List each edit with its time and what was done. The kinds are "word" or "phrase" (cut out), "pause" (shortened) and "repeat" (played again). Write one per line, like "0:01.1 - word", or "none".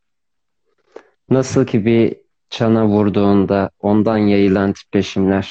none